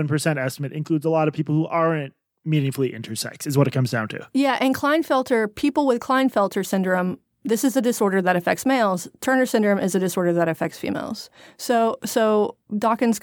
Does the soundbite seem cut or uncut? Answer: uncut